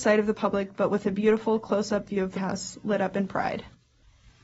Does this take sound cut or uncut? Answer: cut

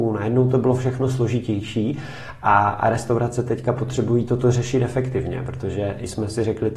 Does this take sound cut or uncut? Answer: uncut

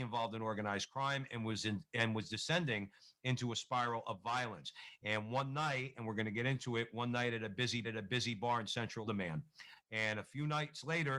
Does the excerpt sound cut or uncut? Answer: cut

